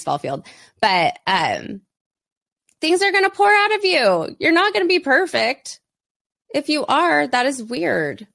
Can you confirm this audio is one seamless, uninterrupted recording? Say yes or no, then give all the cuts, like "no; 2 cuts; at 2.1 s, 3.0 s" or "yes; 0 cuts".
yes; 0 cuts